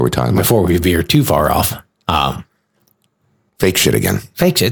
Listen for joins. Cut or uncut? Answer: uncut